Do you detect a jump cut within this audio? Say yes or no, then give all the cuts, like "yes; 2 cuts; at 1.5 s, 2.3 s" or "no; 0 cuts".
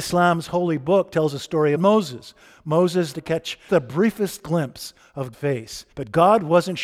yes; 5 cuts; at 1.8 s, 3.1 s, 3.7 s, 5.3 s, 5.9 s